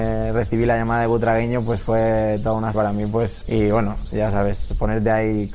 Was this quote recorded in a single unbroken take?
no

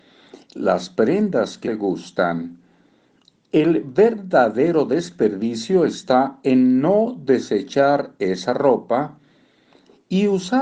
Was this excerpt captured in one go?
no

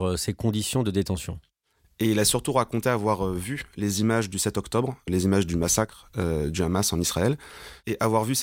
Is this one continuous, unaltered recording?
yes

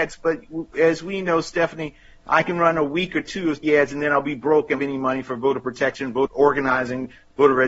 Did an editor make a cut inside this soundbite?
yes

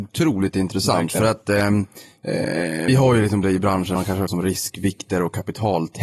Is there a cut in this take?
yes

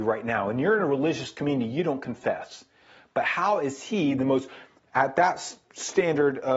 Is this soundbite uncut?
yes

